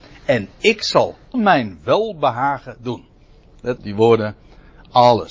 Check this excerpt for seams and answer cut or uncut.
cut